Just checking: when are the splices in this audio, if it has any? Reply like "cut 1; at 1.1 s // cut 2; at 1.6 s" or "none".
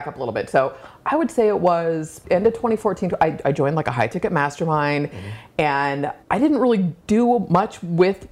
cut 1; at 2.2 s // cut 2; at 6.2 s // cut 3; at 7.0 s